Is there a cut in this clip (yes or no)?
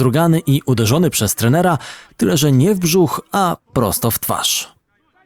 no